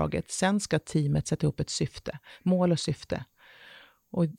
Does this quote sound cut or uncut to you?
uncut